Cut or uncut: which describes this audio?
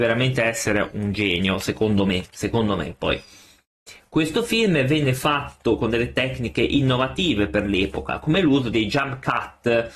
uncut